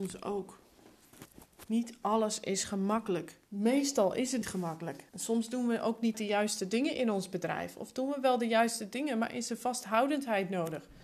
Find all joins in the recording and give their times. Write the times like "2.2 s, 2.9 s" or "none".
3.5 s, 4.4 s, 5.1 s, 6.1 s